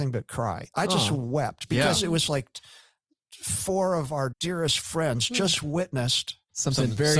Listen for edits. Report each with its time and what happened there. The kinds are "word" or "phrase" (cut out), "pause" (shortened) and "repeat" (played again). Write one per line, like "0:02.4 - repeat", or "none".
0:04.3 - word